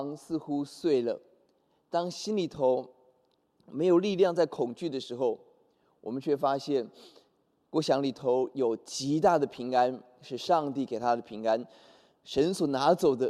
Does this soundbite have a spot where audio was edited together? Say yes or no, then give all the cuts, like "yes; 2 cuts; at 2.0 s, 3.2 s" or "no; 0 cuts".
no; 0 cuts